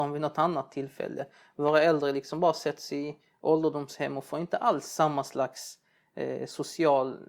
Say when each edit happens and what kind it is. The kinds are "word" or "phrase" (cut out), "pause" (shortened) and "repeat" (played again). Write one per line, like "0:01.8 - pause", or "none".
none